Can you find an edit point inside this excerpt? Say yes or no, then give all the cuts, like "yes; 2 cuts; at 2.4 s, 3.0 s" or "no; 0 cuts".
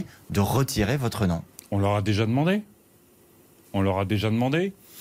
no; 0 cuts